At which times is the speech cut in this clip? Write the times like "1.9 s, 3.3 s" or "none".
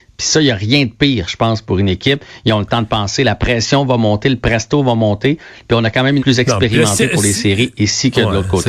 6.2 s